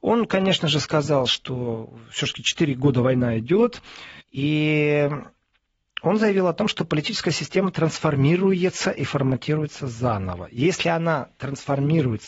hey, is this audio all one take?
no; 1 cut; at 4.2 s

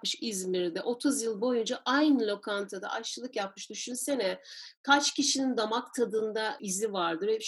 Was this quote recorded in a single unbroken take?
yes; 0 cuts

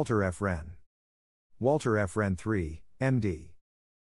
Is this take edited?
no; 0 cuts

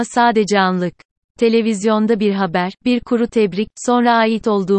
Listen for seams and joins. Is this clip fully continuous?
yes; 0 cuts

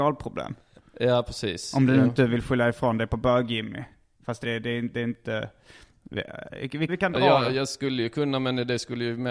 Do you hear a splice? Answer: yes; 2 cuts; at 4.4 s, 6.9 s

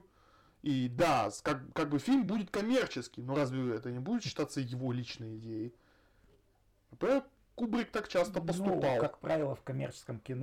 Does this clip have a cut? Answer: no; 0 cuts

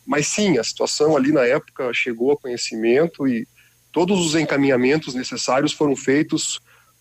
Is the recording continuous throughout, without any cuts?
yes; 0 cuts

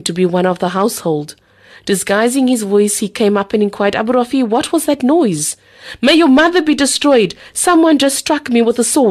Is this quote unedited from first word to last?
yes; 0 cuts

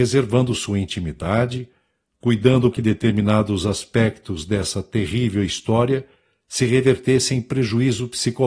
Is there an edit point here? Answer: yes; 1 cut; at 2.7 s

